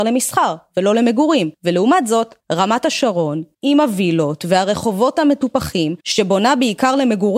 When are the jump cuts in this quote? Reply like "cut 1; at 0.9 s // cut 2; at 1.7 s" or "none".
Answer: cut 1; at 1.5 s // cut 2; at 2.4 s // cut 3; at 3.5 s // cut 4; at 6.0 s